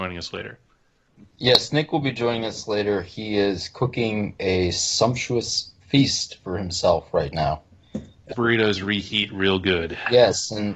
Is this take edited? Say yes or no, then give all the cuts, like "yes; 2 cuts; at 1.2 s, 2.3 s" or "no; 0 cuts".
yes; 1 cut; at 8.3 s